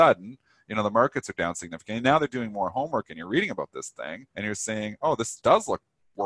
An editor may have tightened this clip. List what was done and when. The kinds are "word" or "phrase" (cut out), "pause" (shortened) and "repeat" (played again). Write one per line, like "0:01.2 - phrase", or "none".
0:04.3 - pause

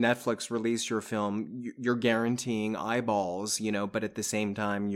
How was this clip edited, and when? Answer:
none

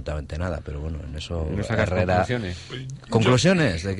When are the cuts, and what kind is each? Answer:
none

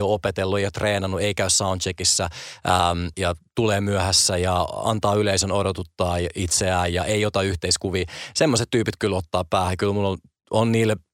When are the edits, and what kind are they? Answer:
0:03.1 - word

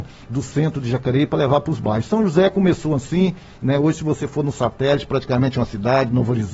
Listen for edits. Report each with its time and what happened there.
none

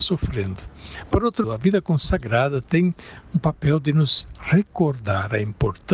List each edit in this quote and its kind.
0:01.4 - word

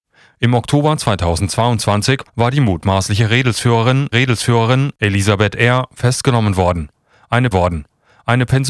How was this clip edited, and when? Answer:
0:02.3 - pause
0:04.1 - repeat
0:07.5 - repeat

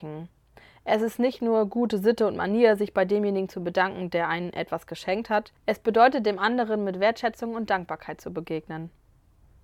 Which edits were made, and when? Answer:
0:05.6 - pause

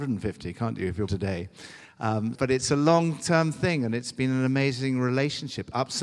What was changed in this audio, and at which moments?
0:01.1 - word
0:02.3 - word

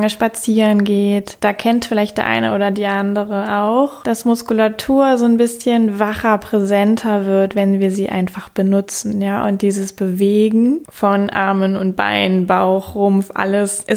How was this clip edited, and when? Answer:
none

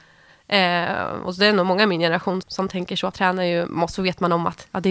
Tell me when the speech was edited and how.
0:02.4 - word
0:03.1 - word

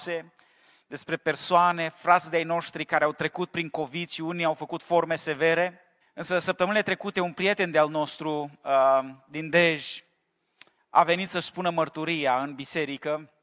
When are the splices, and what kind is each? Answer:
0:06.0 - pause
0:10.8 - pause

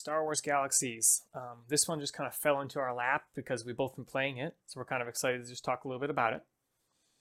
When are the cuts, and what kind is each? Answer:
0:01.2 - pause
0:04.6 - pause

